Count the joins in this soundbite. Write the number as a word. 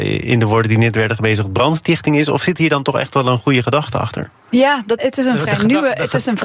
one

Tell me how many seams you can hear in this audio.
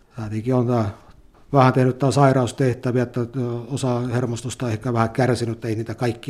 zero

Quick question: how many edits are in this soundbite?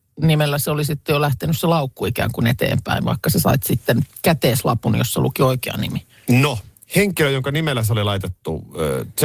zero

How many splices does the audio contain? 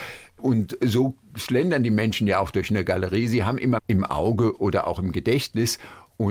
one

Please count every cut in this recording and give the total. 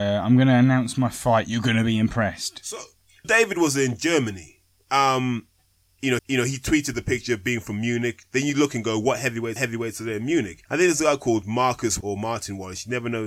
five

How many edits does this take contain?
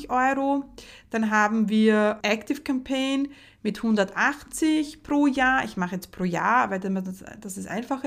one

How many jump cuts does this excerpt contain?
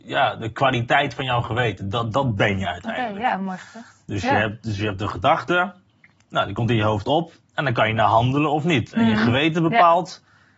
zero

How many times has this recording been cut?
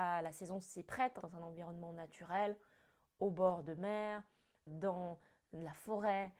two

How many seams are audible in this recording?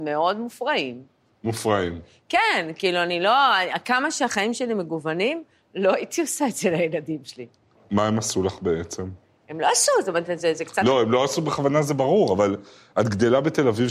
zero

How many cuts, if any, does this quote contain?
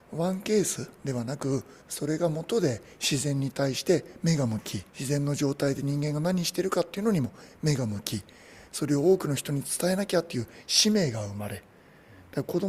three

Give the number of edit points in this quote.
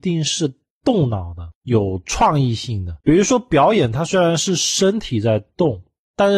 one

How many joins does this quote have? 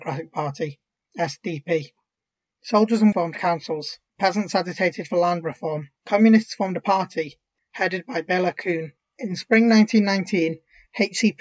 five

